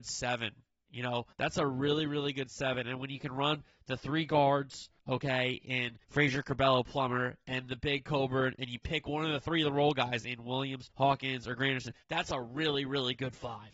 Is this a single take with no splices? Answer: no; 5 cuts; at 1.3 s, 5.0 s, 6.0 s, 10.9 s, 12.0 s

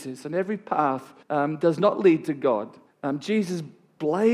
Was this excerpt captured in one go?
no; 2 cuts; at 1.2 s, 2.9 s

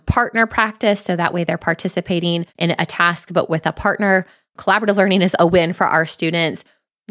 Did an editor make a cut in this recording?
yes; 2 cuts; at 2.5 s, 5.4 s

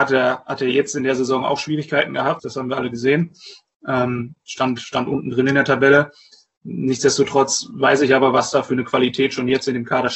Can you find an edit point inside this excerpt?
yes; 1 cut; at 2.4 s

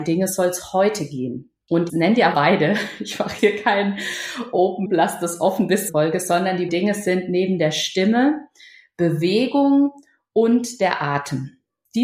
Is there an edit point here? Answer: yes; 6 cuts; at 1.9 s, 2.3 s, 3.4 s, 4.9 s, 5.9 s, 6.7 s

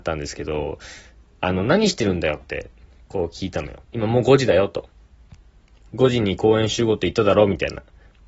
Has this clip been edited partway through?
yes; 1 cut; at 3.8 s

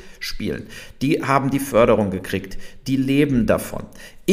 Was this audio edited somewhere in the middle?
no; 0 cuts

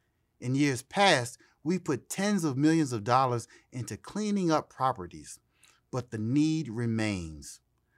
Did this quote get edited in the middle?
no; 0 cuts

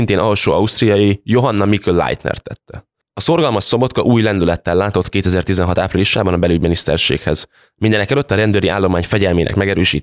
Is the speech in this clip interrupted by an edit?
no; 0 cuts

